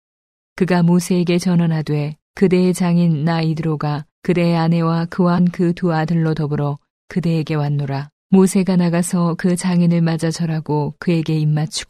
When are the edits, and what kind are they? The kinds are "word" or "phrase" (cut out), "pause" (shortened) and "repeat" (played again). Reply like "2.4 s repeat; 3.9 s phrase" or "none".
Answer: 2.2 s pause; 4.1 s pause; 5.4 s word; 8.2 s pause